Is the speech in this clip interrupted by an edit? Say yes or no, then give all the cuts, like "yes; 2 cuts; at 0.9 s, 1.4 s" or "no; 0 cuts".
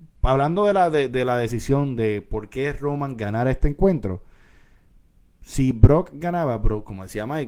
no; 0 cuts